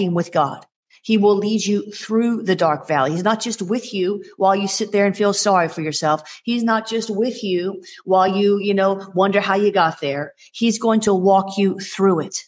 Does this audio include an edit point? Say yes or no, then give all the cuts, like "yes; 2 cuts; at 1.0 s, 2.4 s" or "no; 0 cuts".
no; 0 cuts